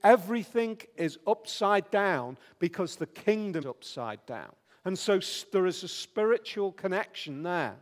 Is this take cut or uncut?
cut